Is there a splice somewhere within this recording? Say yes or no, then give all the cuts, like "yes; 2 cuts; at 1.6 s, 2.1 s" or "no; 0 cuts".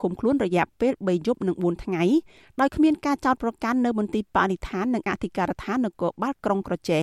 no; 0 cuts